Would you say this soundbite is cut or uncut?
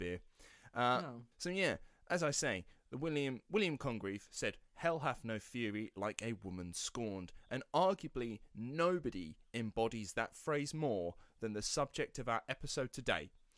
cut